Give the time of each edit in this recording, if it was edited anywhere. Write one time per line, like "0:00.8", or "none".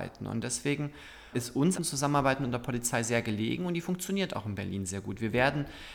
0:01.3
0:01.8